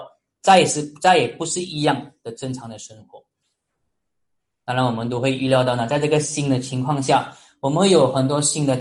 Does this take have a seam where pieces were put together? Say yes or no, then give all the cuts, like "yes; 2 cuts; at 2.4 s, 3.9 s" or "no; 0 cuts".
no; 0 cuts